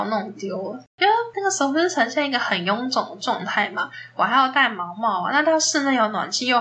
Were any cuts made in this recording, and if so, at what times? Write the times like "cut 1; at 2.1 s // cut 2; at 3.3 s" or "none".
cut 1; at 0.9 s